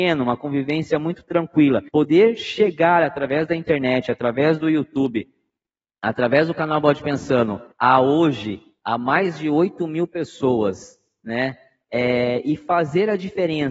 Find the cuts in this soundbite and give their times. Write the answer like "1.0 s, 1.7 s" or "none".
1.9 s, 7.7 s